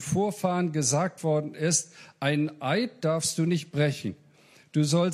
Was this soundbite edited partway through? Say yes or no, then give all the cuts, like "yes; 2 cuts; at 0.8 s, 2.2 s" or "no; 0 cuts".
no; 0 cuts